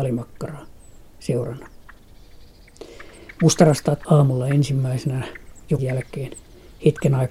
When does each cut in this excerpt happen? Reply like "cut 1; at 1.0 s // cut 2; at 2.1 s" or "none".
cut 1; at 1.2 s // cut 2; at 4.0 s // cut 3; at 5.8 s